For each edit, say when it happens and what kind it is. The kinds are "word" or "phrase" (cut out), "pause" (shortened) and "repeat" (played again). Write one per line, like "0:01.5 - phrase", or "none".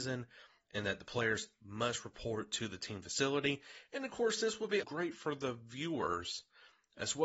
0:04.8 - word

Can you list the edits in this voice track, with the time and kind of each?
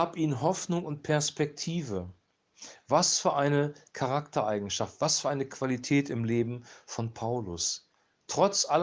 none

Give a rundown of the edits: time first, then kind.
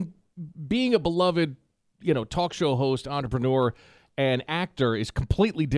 none

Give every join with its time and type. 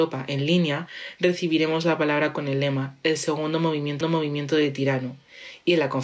0:04.0 - repeat

